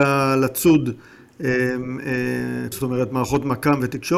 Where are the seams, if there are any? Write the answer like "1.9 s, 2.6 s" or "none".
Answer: 2.7 s